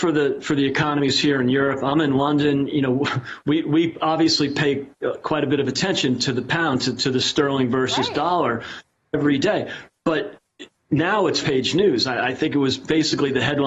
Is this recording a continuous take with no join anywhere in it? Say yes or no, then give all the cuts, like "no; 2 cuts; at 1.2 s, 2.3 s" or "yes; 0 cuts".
no; 1 cut; at 11.4 s